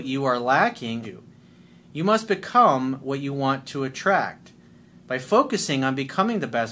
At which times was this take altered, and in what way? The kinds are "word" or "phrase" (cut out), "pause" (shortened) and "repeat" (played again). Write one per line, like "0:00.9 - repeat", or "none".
0:01.0 - phrase